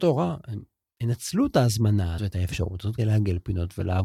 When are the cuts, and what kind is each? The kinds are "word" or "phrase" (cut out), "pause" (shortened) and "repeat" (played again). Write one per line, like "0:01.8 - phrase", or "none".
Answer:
0:02.2 - word
0:03.0 - word

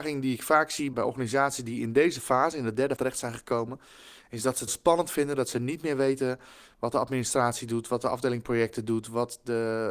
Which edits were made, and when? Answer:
0:00.9 - word
0:03.0 - word
0:04.7 - word

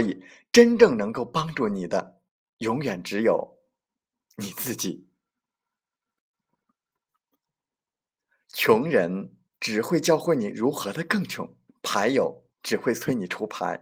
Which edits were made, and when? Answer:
0:09.5 - pause
0:11.7 - pause
0:12.5 - pause

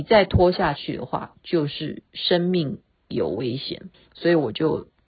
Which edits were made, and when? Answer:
0:03.9 - pause

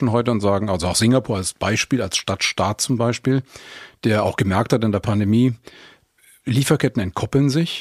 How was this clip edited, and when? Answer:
none

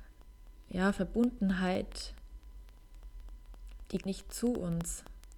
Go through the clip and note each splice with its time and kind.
0:04.0 - word

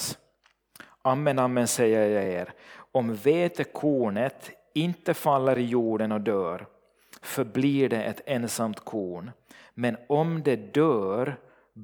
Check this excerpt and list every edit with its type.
none

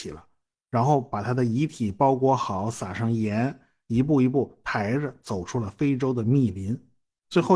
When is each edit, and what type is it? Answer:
none

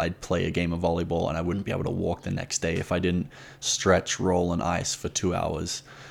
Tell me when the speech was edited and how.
none

